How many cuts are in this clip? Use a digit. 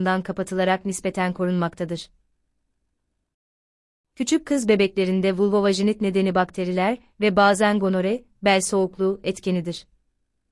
0